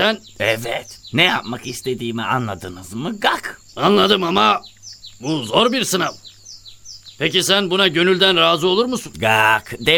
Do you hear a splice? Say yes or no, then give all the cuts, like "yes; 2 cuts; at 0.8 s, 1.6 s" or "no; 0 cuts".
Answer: yes; 1 cut; at 3.7 s